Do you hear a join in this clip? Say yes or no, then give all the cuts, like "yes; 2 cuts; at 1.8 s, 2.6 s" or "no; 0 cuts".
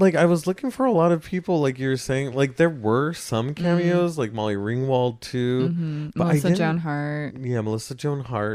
no; 0 cuts